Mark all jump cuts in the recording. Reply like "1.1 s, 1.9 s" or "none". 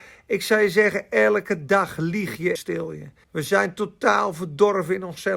2.6 s, 3.2 s